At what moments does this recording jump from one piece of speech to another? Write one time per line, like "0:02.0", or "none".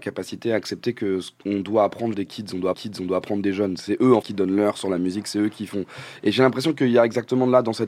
0:02.1
0:02.7
0:04.2